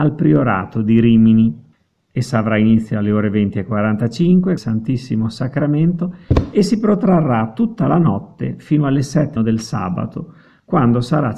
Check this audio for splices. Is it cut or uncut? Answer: cut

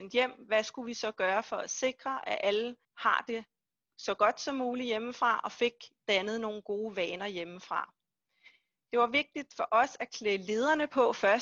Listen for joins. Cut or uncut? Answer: cut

